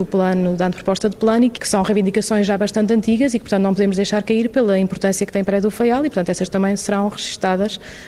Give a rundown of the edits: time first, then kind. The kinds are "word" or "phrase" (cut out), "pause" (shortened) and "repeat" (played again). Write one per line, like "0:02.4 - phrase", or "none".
0:01.6 - word